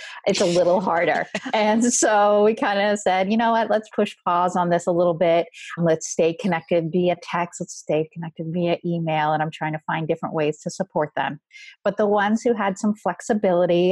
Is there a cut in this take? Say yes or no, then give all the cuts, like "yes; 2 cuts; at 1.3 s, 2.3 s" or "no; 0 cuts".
no; 0 cuts